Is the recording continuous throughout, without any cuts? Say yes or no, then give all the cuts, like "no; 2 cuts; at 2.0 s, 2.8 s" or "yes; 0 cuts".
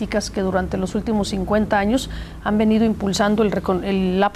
yes; 0 cuts